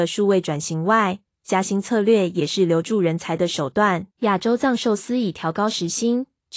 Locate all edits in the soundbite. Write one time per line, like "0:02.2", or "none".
0:04.1